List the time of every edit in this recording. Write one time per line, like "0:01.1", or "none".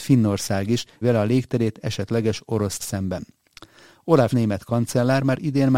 0:01.0
0:02.8
0:04.3